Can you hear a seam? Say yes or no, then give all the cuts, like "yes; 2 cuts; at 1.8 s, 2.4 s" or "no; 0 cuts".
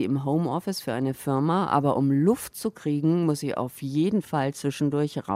no; 0 cuts